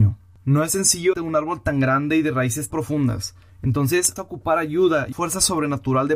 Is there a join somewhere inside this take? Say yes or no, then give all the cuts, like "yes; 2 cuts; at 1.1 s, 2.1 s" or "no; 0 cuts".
yes; 4 cuts; at 1.1 s, 2.7 s, 4.2 s, 5.1 s